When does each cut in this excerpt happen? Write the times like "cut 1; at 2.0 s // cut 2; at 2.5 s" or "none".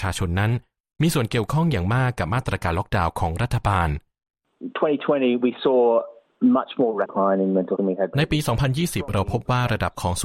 cut 1; at 7.1 s // cut 2; at 7.8 s // cut 3; at 8.1 s